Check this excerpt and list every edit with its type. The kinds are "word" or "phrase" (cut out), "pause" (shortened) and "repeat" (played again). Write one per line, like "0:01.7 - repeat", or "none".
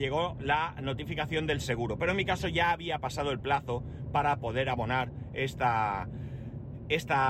none